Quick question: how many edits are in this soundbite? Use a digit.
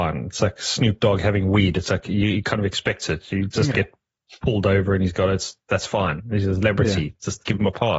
1